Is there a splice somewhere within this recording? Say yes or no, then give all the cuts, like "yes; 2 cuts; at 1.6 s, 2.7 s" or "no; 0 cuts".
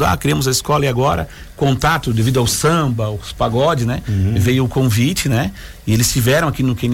no; 0 cuts